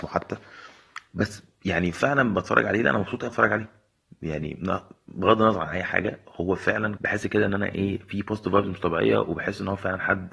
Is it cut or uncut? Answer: cut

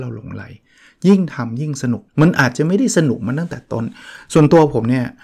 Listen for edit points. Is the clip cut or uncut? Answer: cut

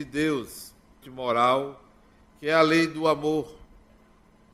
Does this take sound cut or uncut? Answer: cut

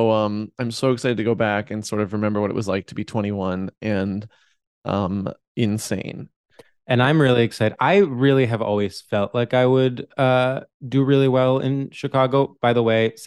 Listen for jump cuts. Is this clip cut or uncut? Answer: uncut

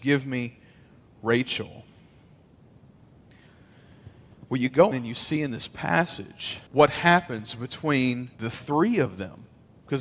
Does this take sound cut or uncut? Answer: cut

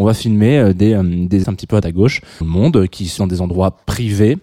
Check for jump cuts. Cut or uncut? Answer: cut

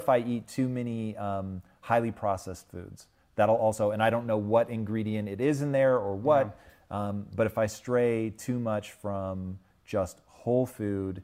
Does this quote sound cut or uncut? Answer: uncut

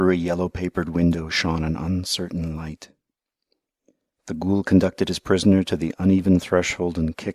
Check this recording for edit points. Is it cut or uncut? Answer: uncut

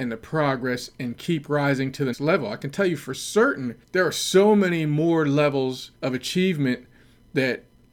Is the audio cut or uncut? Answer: cut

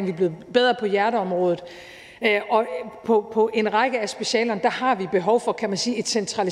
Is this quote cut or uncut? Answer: uncut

